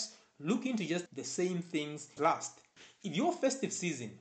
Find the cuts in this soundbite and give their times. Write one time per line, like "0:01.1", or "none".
0:01.1
0:02.2